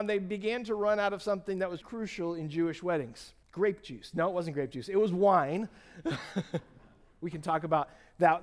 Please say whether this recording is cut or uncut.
cut